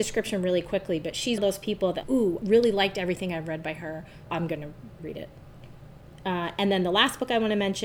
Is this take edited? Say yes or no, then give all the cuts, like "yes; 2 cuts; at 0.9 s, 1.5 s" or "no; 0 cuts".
yes; 5 cuts; at 1.4 s, 2.0 s, 2.4 s, 4.3 s, 5.0 s